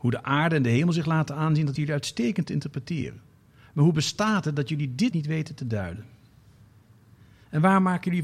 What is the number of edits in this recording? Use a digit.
2